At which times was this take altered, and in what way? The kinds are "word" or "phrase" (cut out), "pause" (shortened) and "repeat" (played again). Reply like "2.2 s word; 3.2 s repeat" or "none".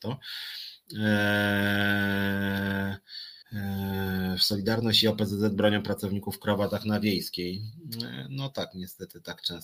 3.4 s pause